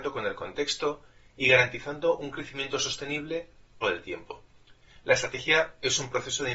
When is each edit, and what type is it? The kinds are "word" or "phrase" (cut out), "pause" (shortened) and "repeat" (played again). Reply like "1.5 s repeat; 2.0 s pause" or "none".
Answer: 3.8 s phrase